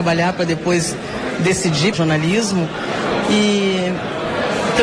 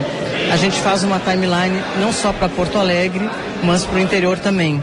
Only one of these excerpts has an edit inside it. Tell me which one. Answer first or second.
first